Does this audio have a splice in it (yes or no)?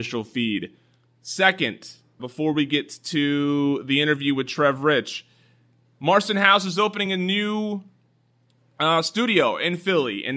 no